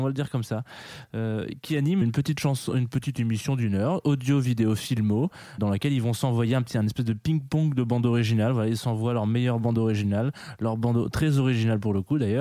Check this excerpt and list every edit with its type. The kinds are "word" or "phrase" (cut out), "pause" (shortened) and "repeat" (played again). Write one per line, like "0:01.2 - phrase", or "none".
0:02.0 - word
0:05.6 - word